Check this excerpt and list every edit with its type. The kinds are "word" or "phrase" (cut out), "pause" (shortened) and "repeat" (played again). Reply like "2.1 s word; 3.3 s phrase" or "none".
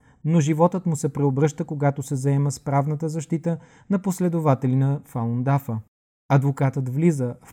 none

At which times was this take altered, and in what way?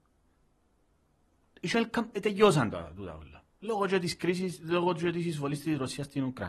none

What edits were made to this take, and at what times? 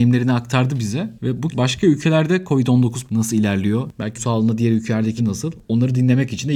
1.5 s word; 3.1 s word; 4.2 s word; 5.2 s word

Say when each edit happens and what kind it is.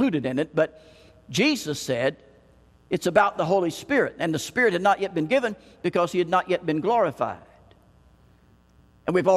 none

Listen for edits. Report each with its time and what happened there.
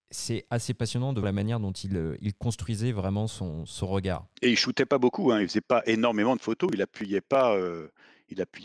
1.2 s word; 4.4 s pause

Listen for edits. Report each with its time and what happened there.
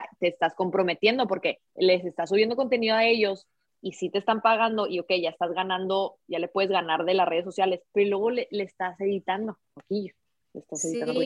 1.7 s pause; 7.9 s pause

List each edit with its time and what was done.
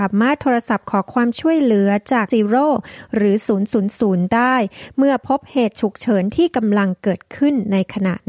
2.3 s word

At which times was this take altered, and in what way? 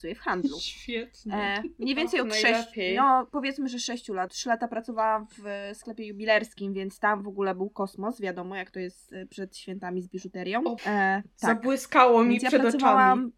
4.3 s word; 10.8 s word

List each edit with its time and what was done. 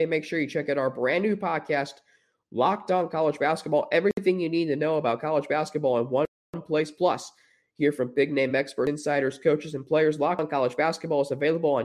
none

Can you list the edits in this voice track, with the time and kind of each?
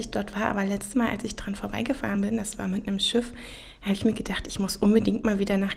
none

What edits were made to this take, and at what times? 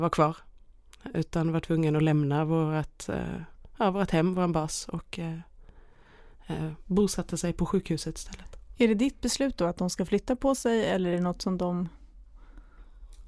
none

